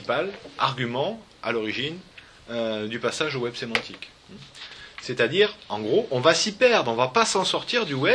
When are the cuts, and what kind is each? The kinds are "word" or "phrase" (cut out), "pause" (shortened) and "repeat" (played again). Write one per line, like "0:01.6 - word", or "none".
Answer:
none